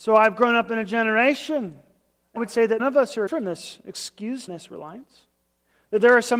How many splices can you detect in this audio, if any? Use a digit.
4